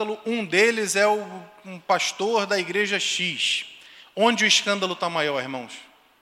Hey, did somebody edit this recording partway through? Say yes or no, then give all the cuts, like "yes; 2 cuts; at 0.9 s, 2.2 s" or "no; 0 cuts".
no; 0 cuts